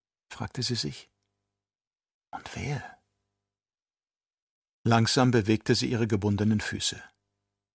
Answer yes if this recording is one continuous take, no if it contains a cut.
yes